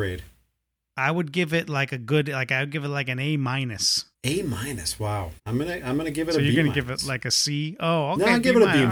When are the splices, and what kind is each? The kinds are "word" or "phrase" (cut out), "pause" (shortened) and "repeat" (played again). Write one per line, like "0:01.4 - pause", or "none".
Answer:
0:04.1 - pause
0:05.4 - pause